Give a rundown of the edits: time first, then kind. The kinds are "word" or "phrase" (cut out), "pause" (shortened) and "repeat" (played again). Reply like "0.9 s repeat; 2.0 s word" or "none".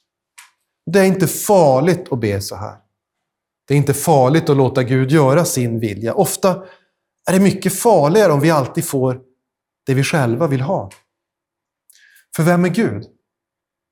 none